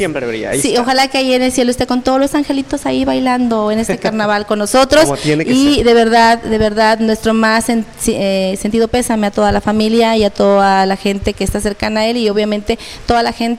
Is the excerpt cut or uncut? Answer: uncut